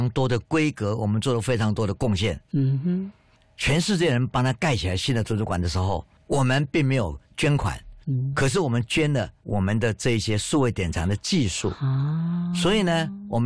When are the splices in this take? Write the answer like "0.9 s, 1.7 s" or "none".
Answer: none